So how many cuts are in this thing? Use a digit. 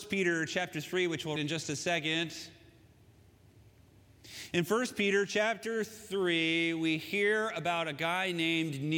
1